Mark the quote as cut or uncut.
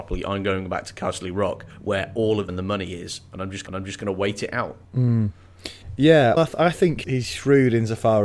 cut